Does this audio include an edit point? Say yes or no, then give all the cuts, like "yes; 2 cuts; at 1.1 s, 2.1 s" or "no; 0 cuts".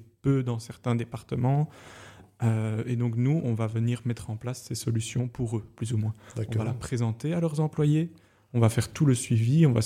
no; 0 cuts